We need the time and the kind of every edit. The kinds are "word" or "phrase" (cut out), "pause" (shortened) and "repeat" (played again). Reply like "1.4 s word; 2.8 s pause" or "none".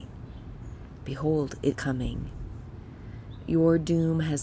1.7 s word

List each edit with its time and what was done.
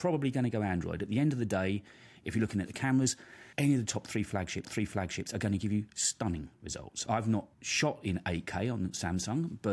3.5 s pause; 4.6 s repeat; 7.5 s pause

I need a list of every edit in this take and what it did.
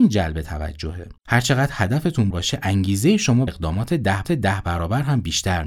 1.2 s pause; 2.3 s word; 3.5 s word; 4.2 s repeat

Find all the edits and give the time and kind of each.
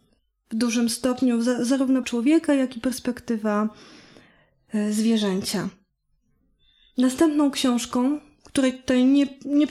2.0 s word

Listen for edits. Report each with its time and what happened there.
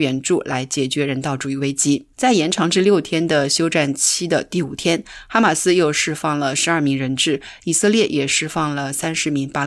2.1 s pause

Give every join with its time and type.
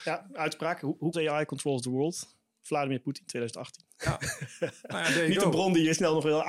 1.1 s word

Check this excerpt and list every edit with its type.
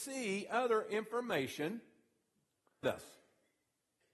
2.8 s word

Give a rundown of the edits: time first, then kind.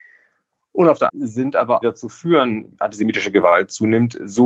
1.1 s phrase; 1.8 s phrase; 2.7 s word

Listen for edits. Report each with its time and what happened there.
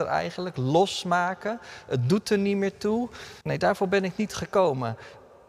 3.4 s pause

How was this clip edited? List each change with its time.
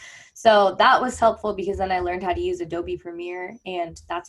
none

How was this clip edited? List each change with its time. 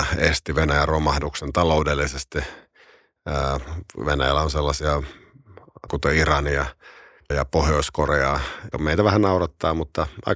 5.9 s word; 7.3 s word; 8.7 s word

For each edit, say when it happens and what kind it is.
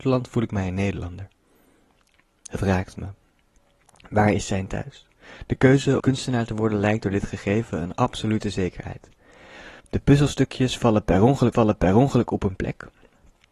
6.0 s word; 9.8 s pause; 11.5 s repeat

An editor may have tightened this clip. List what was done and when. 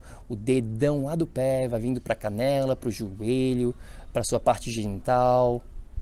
none

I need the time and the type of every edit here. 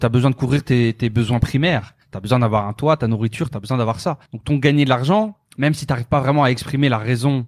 2.0 s pause; 4.3 s pause; 5.5 s pause

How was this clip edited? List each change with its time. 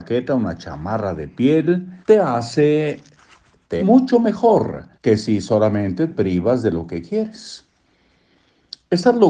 2.0 s pause; 3.8 s phrase; 4.9 s pause; 6.1 s word

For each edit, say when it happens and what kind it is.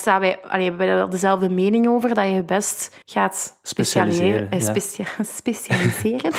3.0 s pause

